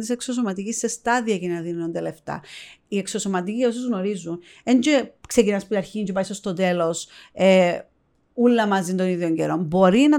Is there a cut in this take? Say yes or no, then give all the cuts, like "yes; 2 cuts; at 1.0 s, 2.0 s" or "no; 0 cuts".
no; 0 cuts